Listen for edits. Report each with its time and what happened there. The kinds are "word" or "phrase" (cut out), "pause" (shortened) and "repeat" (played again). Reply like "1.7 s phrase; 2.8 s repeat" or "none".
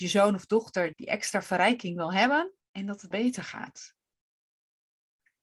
0.9 s word; 2.6 s pause; 3.1 s word